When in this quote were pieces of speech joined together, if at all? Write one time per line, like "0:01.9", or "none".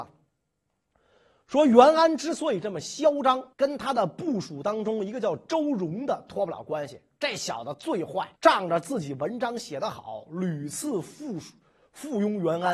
0:03.5
0:08.4